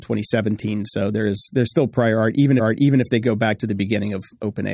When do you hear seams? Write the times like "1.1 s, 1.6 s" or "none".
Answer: 2.6 s